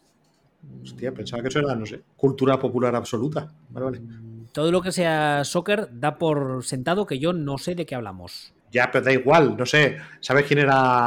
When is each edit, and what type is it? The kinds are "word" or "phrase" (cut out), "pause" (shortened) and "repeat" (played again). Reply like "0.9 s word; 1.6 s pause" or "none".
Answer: 2.1 s pause; 8.6 s pause